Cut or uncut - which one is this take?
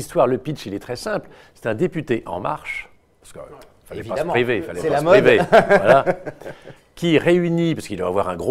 uncut